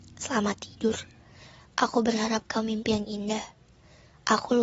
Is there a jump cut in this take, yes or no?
no